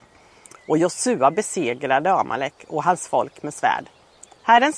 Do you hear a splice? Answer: no; 0 cuts

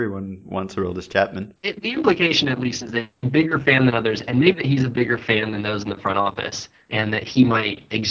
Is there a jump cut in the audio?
no; 0 cuts

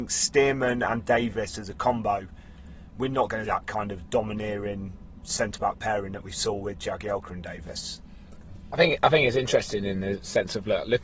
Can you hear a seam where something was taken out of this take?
yes; 1 cut; at 3.4 s

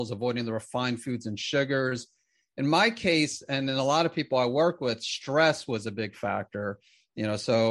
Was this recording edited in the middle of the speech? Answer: no; 0 cuts

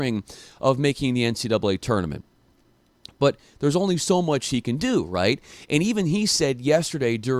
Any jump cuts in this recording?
no; 0 cuts

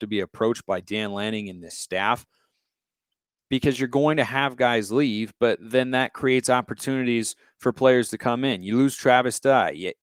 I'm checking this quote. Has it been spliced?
no; 0 cuts

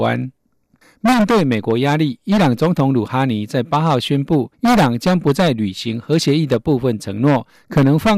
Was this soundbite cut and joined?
yes; 1 cut; at 4.5 s

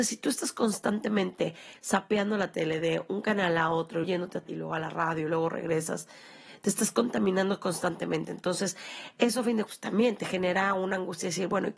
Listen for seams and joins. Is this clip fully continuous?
no; 3 cuts; at 4.0 s, 4.5 s, 9.7 s

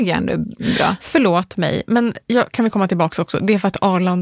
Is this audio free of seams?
yes; 0 cuts

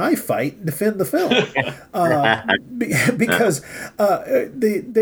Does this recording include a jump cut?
no; 0 cuts

